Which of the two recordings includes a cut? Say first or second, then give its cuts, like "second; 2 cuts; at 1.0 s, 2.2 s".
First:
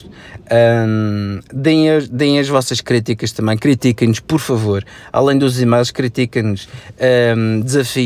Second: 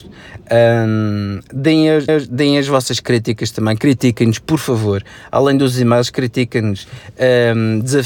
second; 1 cut; at 2.1 s